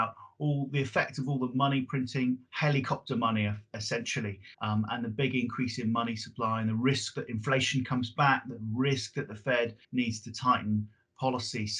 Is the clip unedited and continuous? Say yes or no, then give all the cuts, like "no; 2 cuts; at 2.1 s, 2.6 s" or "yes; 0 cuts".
no; 2 cuts; at 4.5 s, 9.8 s